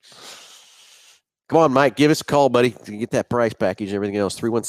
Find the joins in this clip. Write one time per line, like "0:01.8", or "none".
none

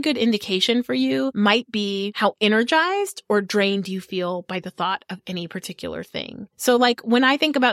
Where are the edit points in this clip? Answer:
none

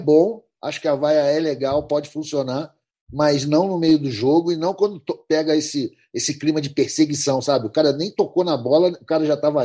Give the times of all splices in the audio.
none

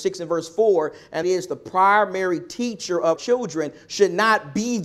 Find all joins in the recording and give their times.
0:01.2
0:03.2

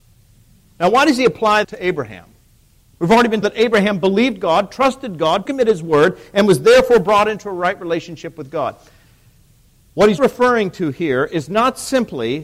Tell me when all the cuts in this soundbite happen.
0:01.6
0:03.4
0:05.5
0:10.2

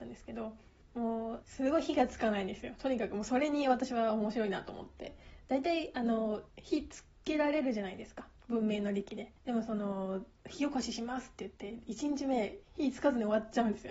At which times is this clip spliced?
0:09.4

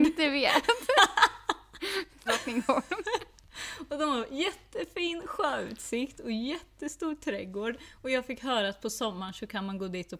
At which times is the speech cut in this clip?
0:02.3

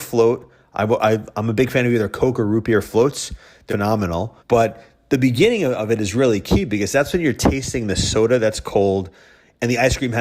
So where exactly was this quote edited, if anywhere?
0:03.7
0:04.4

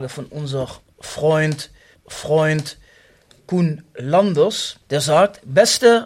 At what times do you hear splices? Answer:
0:01.9
0:04.8

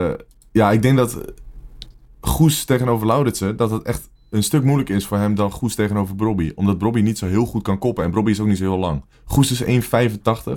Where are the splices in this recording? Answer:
0:09.1

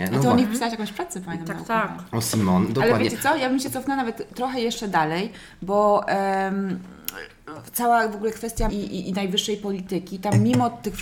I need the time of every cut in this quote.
0:08.7

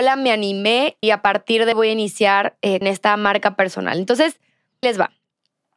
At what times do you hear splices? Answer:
0:01.0
0:01.7
0:02.8
0:04.8

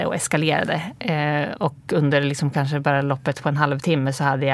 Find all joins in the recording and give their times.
none

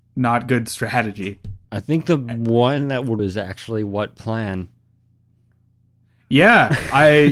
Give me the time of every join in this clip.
0:01.6
0:03.2

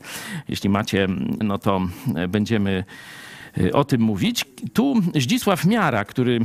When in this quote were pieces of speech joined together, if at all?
0:01.4

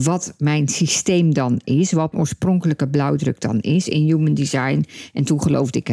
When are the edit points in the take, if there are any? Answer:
0:02.1

